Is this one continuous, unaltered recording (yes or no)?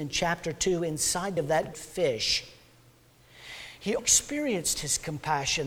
no